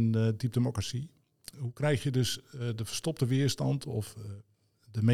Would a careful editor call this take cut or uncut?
uncut